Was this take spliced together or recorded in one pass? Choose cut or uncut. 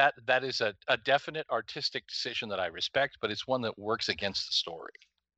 uncut